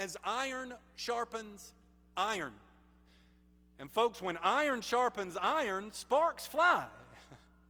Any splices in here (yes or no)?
no